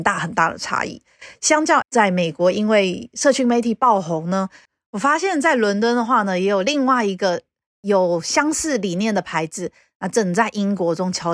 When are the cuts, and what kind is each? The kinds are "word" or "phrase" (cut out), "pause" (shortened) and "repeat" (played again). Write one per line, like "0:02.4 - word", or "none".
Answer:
0:01.8 - word